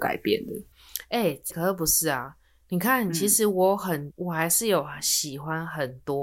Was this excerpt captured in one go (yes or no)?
no